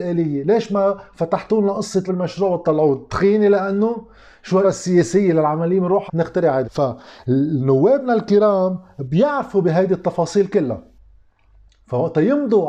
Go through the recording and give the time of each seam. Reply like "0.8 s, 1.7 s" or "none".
2.1 s, 4.6 s, 6.1 s, 6.6 s